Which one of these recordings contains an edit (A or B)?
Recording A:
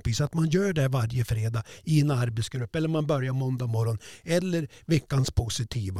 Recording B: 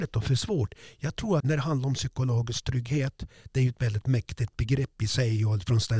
B